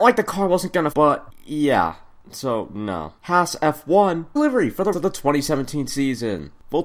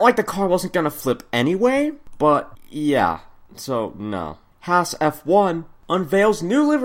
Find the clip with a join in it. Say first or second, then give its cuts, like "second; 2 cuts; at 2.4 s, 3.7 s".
first; 4 cuts; at 0.9 s, 3.2 s, 4.4 s, 4.9 s